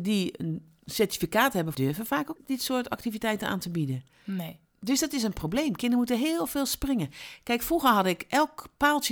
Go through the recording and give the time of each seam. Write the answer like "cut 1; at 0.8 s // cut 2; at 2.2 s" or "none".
cut 1; at 1.7 s // cut 2; at 2.4 s // cut 3; at 4.7 s